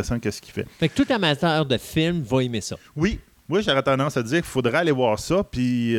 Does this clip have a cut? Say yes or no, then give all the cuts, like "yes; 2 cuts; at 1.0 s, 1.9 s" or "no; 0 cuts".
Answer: no; 0 cuts